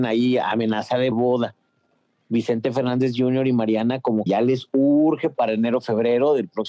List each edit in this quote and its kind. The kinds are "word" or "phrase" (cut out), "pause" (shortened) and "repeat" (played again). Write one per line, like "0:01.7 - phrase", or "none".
0:01.1 - phrase
0:04.3 - word

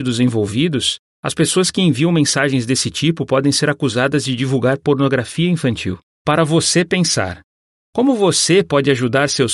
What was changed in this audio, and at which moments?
0:06.1 - pause

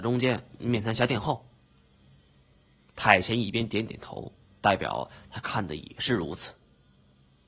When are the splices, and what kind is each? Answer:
none

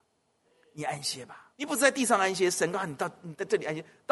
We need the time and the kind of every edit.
0:01.5 - pause

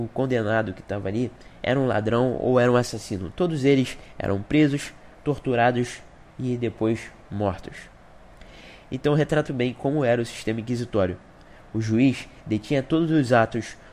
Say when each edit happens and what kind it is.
0:09.5 - word

